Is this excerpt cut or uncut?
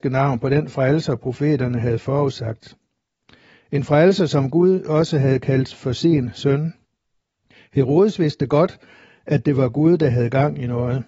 uncut